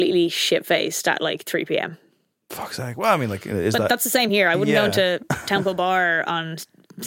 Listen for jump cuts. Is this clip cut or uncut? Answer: uncut